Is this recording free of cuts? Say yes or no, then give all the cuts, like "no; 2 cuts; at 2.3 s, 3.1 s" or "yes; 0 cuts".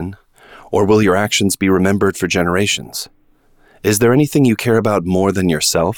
yes; 0 cuts